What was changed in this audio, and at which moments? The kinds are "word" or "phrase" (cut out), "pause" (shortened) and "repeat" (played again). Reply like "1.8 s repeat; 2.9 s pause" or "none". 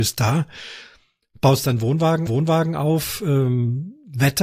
2.3 s repeat